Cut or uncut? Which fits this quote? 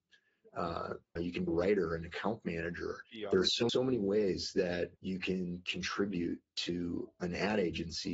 cut